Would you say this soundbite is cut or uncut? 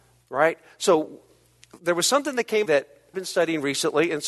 cut